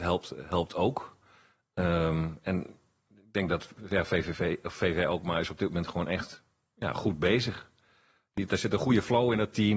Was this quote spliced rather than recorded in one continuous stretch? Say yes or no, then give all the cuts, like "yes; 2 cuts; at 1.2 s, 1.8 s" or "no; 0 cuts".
no; 0 cuts